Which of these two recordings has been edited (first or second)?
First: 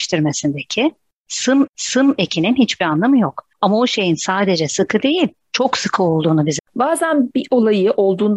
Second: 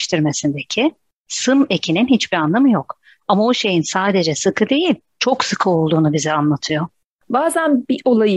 first